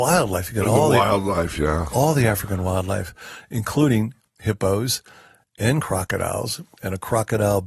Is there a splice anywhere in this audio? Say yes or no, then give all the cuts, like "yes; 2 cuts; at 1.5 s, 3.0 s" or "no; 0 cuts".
no; 0 cuts